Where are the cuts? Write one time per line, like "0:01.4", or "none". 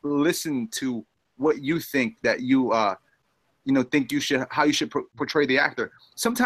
none